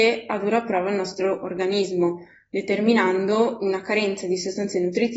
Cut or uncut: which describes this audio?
uncut